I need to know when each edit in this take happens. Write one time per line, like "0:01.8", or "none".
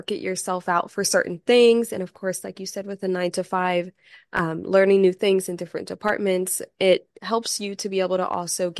none